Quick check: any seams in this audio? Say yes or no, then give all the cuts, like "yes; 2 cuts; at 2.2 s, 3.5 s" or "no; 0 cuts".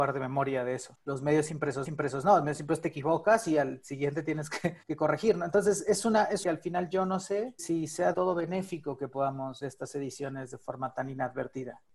yes; 6 cuts; at 1.9 s, 4.8 s, 6.4 s, 7.6 s, 8.1 s, 9.6 s